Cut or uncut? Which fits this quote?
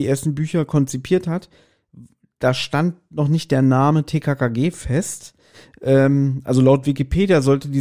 uncut